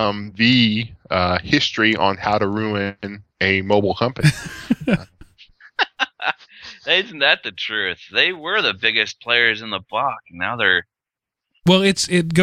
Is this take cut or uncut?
uncut